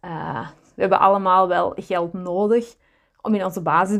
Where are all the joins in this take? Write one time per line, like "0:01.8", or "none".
none